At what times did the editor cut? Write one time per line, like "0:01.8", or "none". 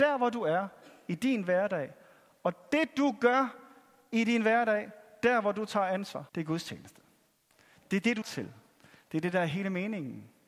0:06.3
0:08.2